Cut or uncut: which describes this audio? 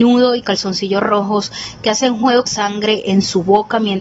cut